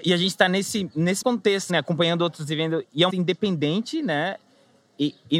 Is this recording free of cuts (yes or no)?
no